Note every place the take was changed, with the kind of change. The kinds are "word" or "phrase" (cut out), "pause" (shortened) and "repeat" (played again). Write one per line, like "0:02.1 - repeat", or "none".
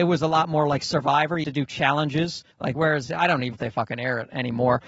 0:01.4 - word
0:02.5 - pause
0:03.1 - word
0:03.5 - word